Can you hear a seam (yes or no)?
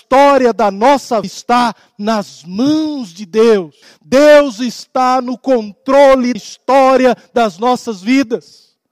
yes